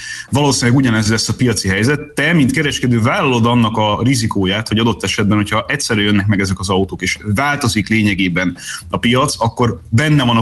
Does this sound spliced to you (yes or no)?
no